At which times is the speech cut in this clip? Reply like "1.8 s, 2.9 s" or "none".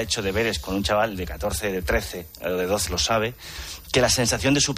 2.9 s